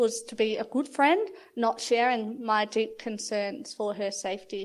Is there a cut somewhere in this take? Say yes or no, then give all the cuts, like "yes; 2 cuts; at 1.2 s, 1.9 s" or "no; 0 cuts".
no; 0 cuts